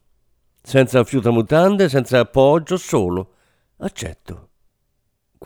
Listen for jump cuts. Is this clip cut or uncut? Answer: uncut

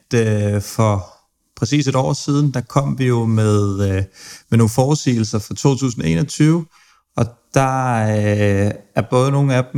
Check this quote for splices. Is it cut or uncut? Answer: uncut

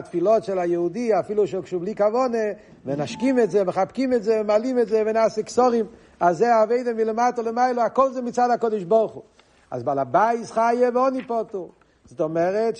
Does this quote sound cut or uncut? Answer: uncut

